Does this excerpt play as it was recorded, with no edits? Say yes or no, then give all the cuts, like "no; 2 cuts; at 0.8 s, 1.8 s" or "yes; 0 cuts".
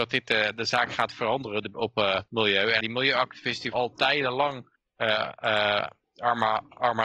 no; 4 cuts; at 1.7 s, 2.3 s, 2.8 s, 3.7 s